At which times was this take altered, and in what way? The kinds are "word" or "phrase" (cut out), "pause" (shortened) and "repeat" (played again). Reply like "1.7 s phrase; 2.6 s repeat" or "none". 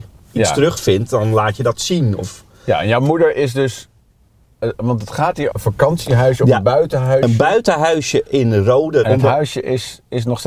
5.5 s word